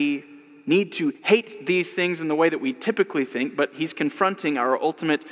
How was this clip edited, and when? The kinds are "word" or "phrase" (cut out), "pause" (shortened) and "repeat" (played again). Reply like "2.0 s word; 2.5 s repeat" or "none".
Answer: 1.2 s pause